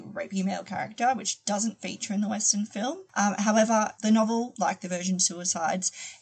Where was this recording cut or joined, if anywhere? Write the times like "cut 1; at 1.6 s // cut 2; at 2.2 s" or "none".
none